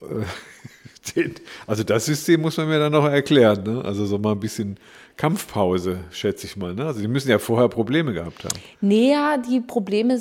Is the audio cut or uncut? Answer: uncut